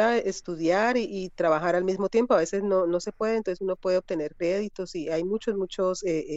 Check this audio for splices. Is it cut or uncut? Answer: uncut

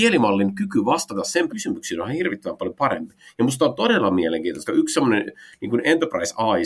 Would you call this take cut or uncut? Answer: cut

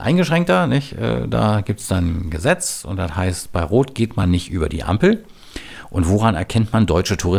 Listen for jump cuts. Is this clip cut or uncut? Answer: uncut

